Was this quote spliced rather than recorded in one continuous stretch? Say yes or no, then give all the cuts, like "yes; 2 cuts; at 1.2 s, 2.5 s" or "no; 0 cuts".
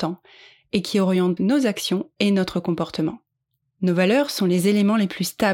yes; 1 cut; at 1.4 s